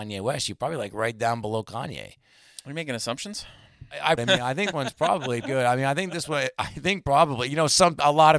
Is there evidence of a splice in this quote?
yes; 3 cuts; at 4.2 s, 4.7 s, 5.4 s

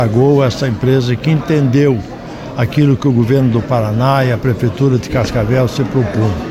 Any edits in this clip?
no; 0 cuts

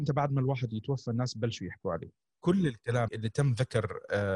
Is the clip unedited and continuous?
no; 2 cuts; at 2.3 s, 3.1 s

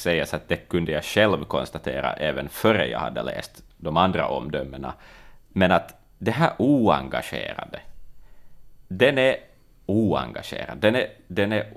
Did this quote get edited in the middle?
no; 0 cuts

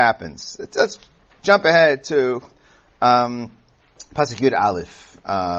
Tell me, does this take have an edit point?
no; 0 cuts

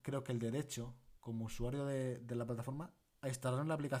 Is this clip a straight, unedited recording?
no; 1 cut; at 1.2 s

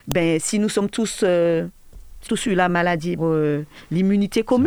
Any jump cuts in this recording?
yes; 3 cuts; at 2.3 s, 2.7 s, 3.2 s

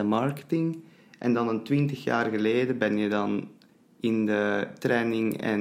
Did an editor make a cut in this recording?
no; 0 cuts

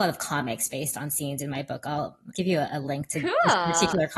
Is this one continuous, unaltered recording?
no; 1 cut; at 2.3 s

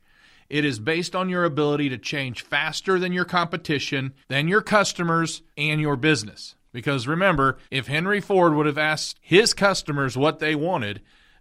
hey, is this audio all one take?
no; 5 cuts; at 4.2 s, 5.5 s, 6.7 s, 7.7 s, 9.2 s

